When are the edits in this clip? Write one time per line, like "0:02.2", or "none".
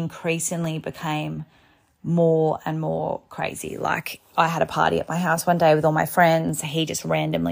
none